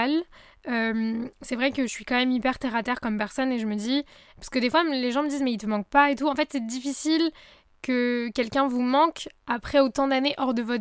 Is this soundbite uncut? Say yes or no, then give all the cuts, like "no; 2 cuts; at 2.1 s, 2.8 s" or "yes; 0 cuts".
yes; 0 cuts